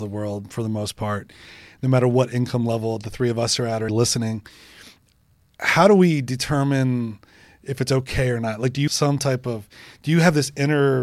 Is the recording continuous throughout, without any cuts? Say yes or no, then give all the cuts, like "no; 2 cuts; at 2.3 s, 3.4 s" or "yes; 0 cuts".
no; 2 cuts; at 3.9 s, 8.9 s